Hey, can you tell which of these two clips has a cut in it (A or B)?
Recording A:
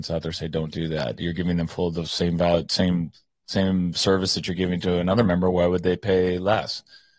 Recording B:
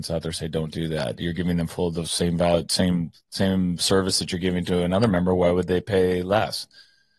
B